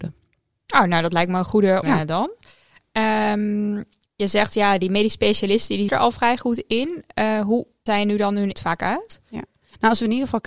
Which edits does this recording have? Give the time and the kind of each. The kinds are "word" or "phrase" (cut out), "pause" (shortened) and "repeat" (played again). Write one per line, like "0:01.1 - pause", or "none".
0:01.8 - word
0:04.1 - word
0:05.9 - word
0:07.9 - word
0:08.5 - word